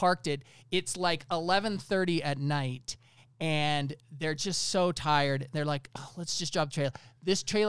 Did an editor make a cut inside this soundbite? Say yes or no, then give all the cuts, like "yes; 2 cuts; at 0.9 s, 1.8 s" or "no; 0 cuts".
no; 0 cuts